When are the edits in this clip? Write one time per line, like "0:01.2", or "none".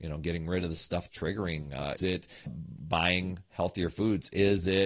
0:01.1
0:02.0
0:02.5